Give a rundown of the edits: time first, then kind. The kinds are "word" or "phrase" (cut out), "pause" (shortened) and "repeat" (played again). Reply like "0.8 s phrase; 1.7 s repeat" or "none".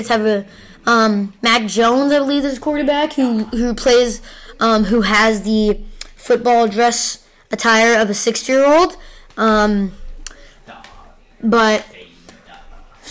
none